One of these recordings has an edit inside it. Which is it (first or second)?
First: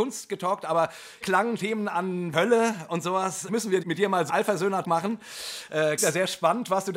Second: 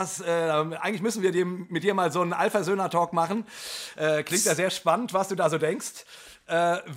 first